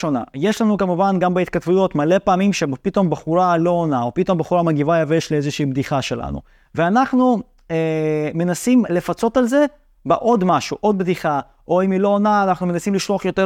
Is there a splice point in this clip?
no; 0 cuts

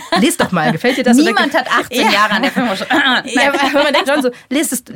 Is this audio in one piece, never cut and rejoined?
no; 1 cut; at 4.1 s

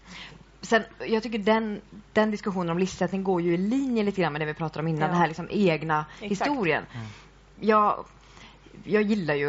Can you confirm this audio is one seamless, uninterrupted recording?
yes; 0 cuts

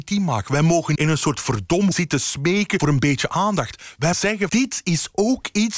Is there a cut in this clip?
yes; 5 cuts; at 0.9 s, 1.9 s, 2.8 s, 4.1 s, 4.5 s

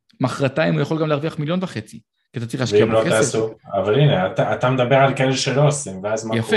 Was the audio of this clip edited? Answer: no; 0 cuts

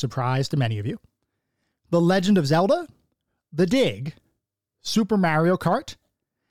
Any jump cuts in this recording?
no; 0 cuts

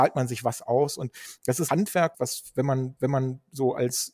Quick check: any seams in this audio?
yes; 3 cuts; at 1.7 s, 2.1 s, 3.0 s

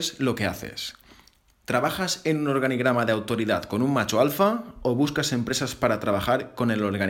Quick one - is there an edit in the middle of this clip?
no; 0 cuts

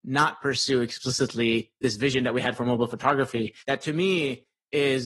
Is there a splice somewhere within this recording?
yes; 1 cut; at 3.6 s

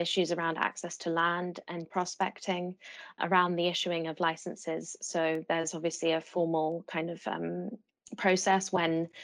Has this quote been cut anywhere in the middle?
yes; 2 cuts; at 1.8 s, 3.2 s

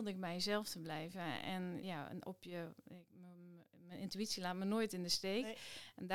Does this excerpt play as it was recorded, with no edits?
no; 1 cut; at 1.8 s

